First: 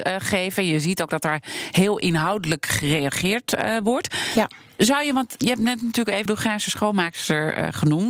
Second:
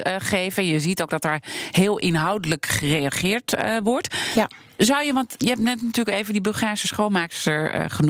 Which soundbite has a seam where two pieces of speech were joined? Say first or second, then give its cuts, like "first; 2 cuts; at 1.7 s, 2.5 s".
first; 1 cut; at 6.3 s